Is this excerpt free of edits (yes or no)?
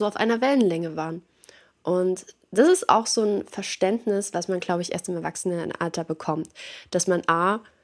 yes